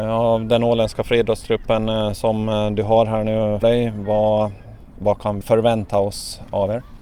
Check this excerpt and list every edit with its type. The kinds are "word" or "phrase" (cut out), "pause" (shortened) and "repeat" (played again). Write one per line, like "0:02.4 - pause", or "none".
0:03.6 - word
0:05.4 - word